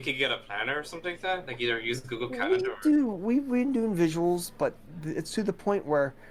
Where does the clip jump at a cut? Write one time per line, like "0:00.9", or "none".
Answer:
none